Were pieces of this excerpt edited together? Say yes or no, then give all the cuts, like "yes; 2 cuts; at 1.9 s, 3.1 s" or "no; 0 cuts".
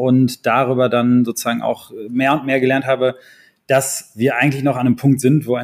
no; 0 cuts